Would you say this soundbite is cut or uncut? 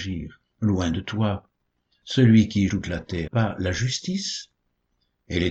cut